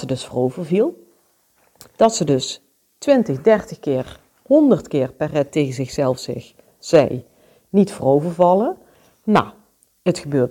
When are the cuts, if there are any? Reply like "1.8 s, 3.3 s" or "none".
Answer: none